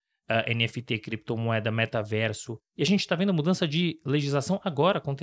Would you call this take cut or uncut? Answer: uncut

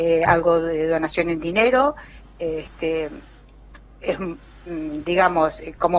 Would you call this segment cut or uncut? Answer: uncut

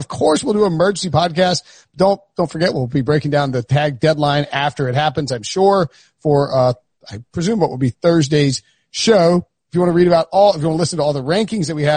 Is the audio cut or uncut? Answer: uncut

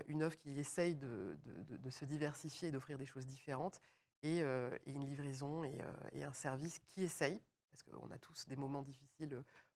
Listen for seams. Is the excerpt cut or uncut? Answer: uncut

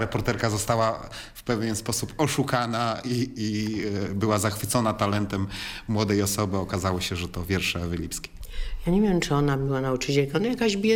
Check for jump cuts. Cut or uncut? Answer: uncut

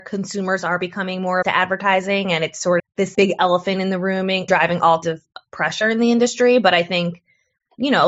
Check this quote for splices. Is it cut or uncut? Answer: cut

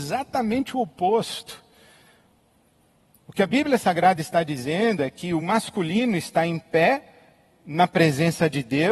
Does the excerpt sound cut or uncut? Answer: uncut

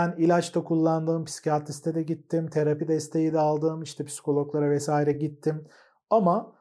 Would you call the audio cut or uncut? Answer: uncut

